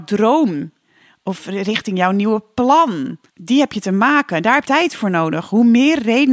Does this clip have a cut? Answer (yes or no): yes